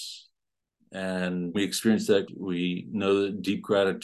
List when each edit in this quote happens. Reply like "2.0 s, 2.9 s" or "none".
1.5 s, 2.3 s